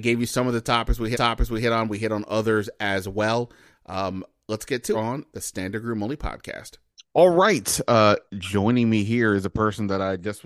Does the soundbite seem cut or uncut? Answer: cut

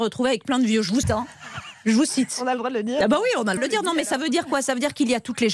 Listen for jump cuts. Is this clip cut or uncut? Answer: cut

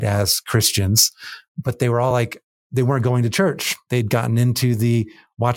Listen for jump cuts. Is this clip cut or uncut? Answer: uncut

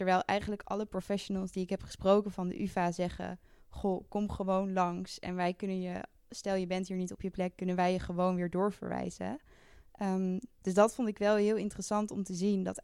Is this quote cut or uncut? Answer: uncut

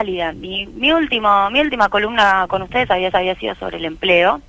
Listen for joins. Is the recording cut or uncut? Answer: cut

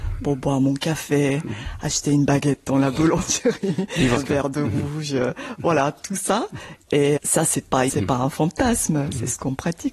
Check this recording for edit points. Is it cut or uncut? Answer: cut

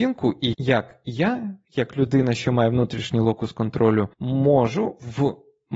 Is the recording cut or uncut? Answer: cut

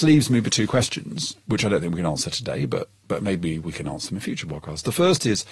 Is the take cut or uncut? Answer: uncut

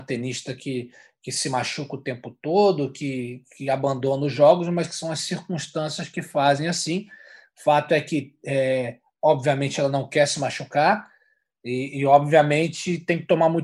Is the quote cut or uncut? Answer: uncut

